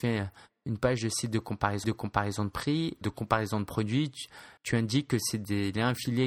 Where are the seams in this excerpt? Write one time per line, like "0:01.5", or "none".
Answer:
0:01.8
0:03.0
0:04.6